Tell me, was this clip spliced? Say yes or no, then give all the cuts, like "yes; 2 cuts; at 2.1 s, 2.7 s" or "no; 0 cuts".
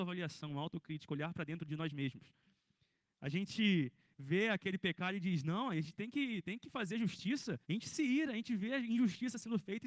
yes; 1 cut; at 7.6 s